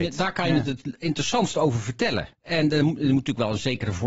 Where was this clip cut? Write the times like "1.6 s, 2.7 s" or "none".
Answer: 2.3 s